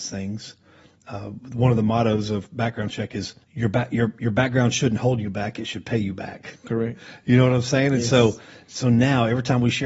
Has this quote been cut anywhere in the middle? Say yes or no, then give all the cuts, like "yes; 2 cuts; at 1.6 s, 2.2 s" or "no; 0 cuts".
yes; 1 cut; at 3.4 s